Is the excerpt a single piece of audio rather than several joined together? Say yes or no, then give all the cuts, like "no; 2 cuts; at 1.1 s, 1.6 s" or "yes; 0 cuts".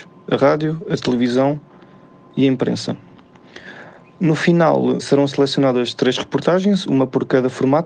no; 1 cut; at 5.0 s